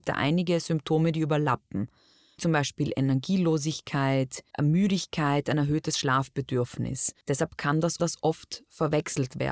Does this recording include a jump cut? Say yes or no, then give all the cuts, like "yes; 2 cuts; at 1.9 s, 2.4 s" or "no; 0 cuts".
yes; 4 cuts; at 2.4 s, 4.5 s, 7.2 s, 8.0 s